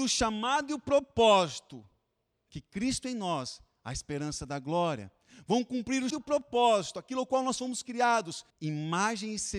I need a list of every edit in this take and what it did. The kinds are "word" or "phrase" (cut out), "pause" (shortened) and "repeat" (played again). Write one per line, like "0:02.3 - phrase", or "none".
0:02.3 - pause
0:06.1 - word
0:08.5 - pause

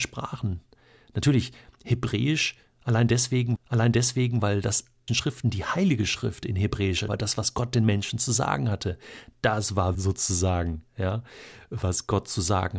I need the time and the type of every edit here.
0:03.6 - repeat
0:05.1 - phrase
0:07.1 - word
0:09.9 - word

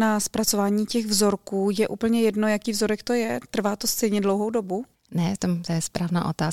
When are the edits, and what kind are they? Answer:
0:04.9 - pause

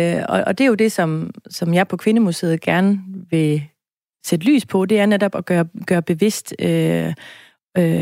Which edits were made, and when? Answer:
none

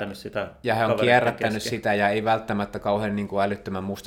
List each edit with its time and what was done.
none

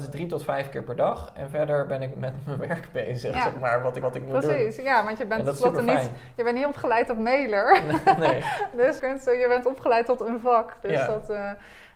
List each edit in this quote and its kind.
0:02.1 - word
0:04.0 - repeat
0:09.0 - word
0:09.6 - word

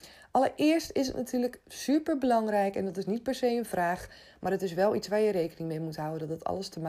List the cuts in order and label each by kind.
none

